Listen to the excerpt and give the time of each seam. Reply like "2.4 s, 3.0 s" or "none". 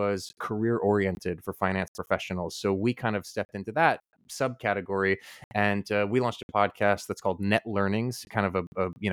none